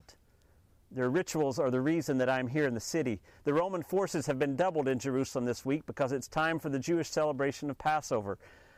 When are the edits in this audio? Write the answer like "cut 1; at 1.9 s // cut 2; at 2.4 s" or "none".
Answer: none